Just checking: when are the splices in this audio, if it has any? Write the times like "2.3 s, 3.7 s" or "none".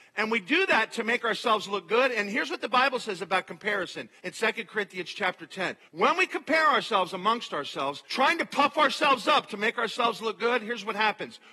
4.2 s, 5.9 s, 8.1 s